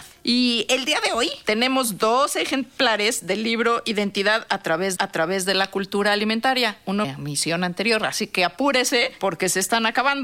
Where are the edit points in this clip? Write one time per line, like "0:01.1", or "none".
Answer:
0:05.0
0:07.0